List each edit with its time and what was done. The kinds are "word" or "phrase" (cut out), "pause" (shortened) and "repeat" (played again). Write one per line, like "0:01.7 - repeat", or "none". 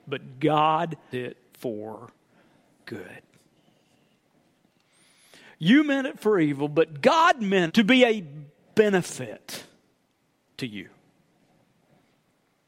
0:01.1 - word
0:07.7 - word

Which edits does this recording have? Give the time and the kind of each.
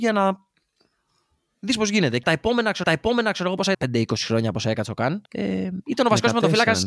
0:02.2 - word
0:02.8 - repeat
0:03.7 - word
0:05.3 - pause

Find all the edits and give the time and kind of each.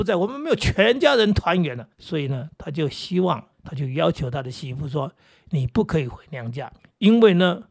0:01.9 - pause
0:03.5 - pause
0:06.8 - pause

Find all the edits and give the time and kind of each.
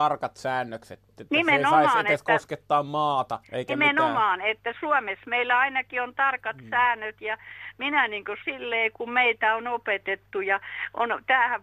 0:03.4 - pause
0:08.4 - word

